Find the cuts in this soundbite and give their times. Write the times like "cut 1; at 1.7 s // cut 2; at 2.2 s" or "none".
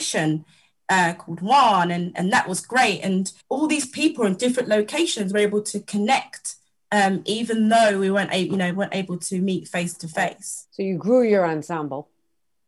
cut 1; at 3.4 s // cut 2; at 10.7 s